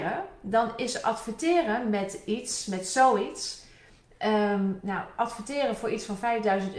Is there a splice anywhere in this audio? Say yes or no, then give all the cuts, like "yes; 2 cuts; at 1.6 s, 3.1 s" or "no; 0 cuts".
no; 0 cuts